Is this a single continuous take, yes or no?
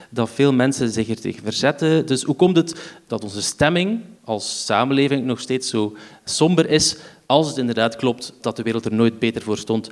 no